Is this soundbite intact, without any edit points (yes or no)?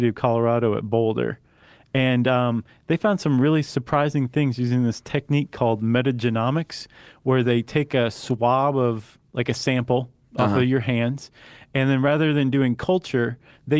yes